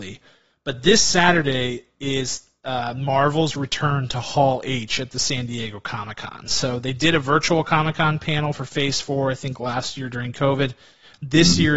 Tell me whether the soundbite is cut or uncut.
uncut